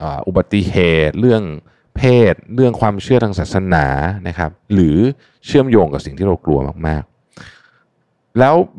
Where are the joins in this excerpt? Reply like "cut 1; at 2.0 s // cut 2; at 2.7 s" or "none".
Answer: cut 1; at 7.5 s